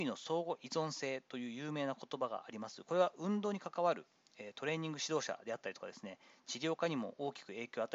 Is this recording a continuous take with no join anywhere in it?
yes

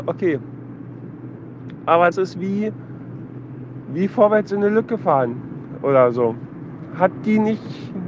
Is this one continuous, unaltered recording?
no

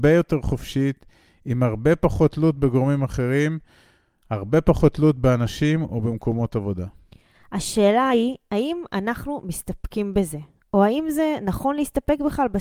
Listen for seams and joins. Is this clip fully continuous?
yes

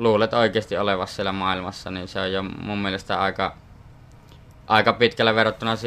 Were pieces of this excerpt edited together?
no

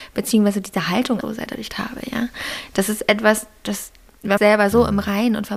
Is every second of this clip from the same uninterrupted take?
no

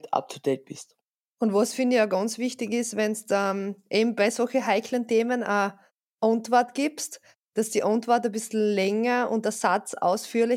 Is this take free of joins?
yes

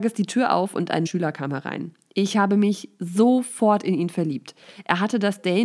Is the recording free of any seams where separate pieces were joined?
no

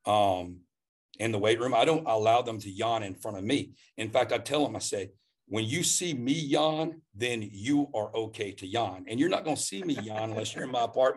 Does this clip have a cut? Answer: no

